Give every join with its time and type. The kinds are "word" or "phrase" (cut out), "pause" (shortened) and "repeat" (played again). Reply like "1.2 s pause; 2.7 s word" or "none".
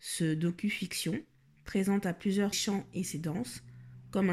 2.5 s phrase